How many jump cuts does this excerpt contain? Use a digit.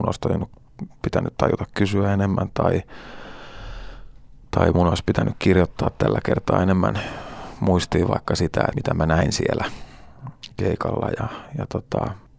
1